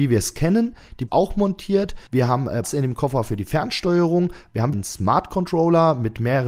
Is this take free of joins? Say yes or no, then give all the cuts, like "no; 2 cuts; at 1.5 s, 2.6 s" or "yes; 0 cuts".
no; 4 cuts; at 1.1 s, 2.1 s, 2.6 s, 4.7 s